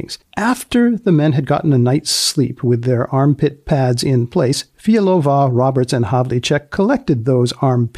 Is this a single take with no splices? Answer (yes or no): yes